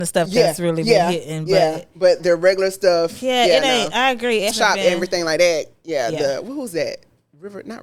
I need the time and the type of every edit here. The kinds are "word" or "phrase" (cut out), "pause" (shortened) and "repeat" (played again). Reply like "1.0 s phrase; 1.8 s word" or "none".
2.2 s word; 4.5 s word